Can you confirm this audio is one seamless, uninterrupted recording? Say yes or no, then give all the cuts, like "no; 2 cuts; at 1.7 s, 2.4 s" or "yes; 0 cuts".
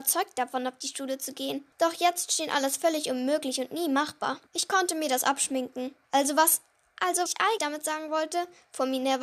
no; 5 cuts; at 1.7 s, 4.5 s, 6.0 s, 7.3 s, 7.6 s